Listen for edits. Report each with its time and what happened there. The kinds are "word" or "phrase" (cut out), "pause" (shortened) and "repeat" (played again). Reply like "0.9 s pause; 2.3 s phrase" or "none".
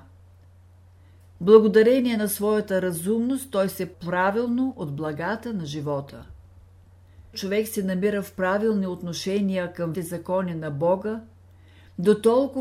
3.9 s word; 7.3 s word; 9.9 s word